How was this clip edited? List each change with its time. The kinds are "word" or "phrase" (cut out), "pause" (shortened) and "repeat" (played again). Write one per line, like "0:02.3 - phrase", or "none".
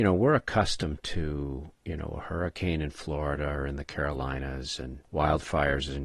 none